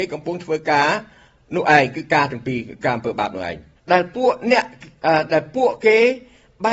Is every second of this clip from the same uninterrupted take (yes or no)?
no